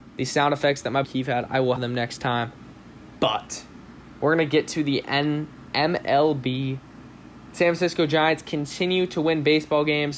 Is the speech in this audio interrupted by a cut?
yes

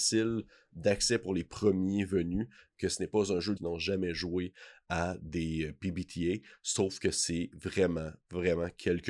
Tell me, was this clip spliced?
yes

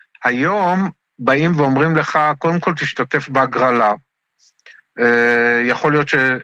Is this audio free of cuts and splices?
yes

